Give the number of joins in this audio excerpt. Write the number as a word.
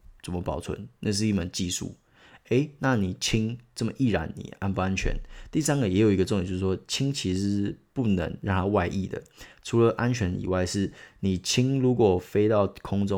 zero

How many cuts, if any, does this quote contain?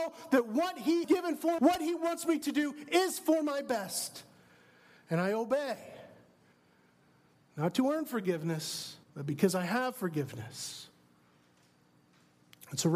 three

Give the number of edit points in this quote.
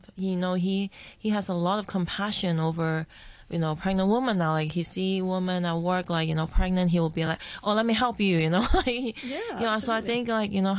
zero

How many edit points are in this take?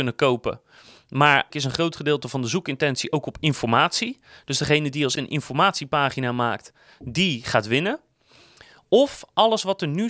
two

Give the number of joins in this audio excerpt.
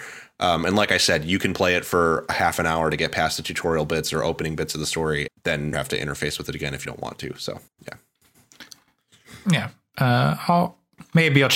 four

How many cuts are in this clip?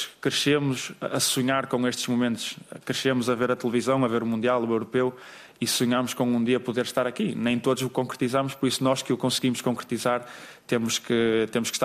zero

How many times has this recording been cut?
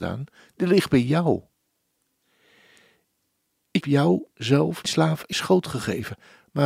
three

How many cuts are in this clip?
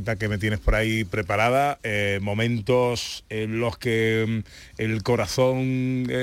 zero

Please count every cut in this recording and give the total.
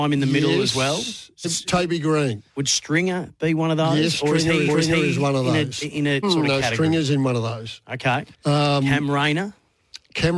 five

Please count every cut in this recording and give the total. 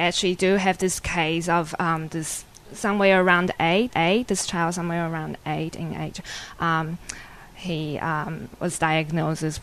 one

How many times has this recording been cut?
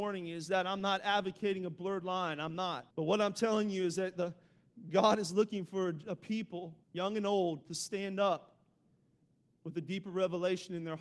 two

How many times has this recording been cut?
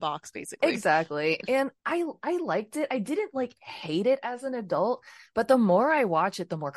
one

